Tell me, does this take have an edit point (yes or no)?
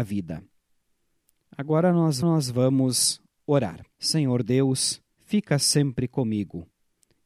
yes